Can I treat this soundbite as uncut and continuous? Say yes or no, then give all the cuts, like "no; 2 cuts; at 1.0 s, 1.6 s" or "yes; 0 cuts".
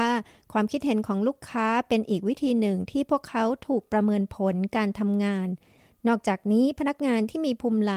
yes; 0 cuts